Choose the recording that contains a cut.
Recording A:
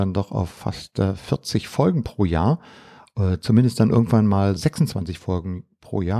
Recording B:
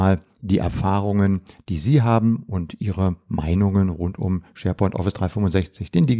A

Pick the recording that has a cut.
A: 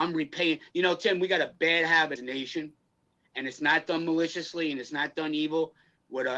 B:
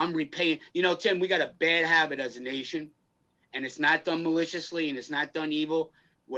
A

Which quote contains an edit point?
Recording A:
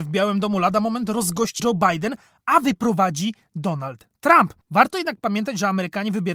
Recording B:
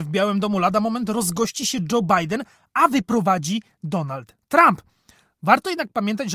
A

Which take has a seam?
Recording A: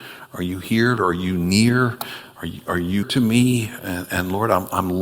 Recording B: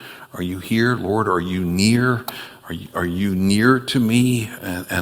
A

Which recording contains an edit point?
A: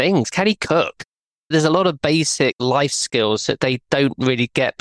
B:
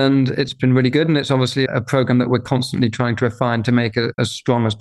B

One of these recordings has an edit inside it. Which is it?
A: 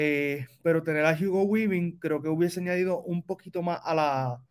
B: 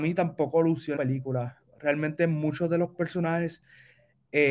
B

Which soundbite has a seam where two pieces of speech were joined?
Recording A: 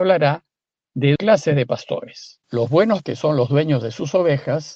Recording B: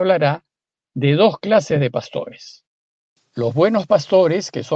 A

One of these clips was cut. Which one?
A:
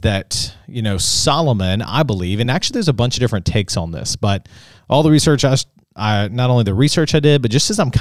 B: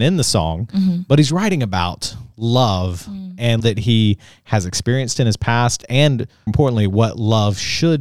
B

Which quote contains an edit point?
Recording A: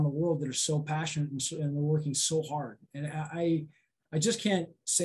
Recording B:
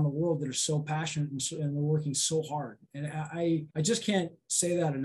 B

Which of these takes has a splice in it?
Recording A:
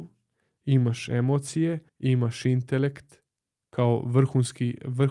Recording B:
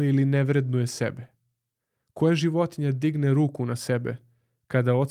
A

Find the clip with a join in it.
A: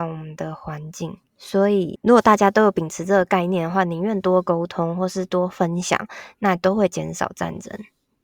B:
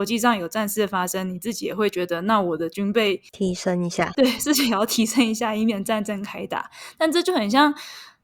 A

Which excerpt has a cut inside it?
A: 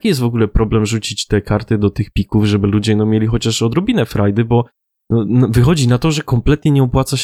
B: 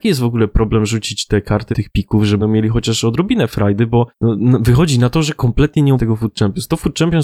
B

